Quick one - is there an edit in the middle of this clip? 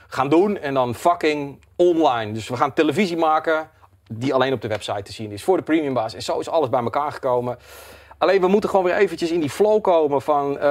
no; 0 cuts

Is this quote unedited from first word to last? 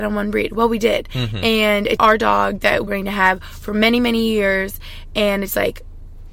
no; 2 cuts; at 2.0 s, 2.9 s

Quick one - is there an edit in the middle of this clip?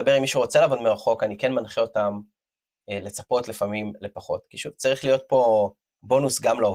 no; 0 cuts

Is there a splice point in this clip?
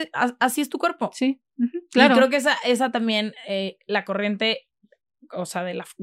no; 0 cuts

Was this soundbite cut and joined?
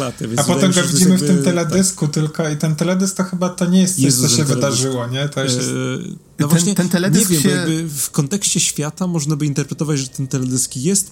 no; 0 cuts

